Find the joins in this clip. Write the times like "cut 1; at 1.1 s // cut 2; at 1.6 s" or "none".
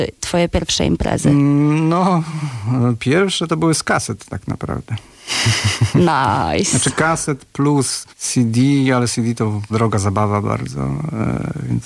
cut 1; at 8.1 s // cut 2; at 9.7 s